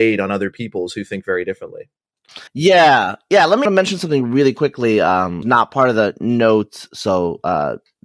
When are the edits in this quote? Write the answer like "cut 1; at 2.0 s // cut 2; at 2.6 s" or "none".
cut 1; at 2.5 s // cut 2; at 3.7 s // cut 3; at 5.4 s